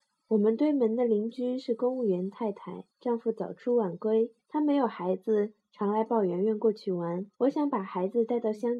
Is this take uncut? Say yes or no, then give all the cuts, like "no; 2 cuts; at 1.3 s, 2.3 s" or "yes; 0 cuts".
no; 3 cuts; at 2.9 s, 4.4 s, 7.3 s